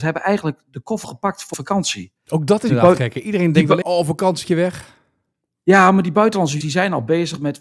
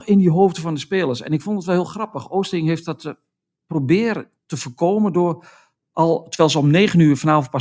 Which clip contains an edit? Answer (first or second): first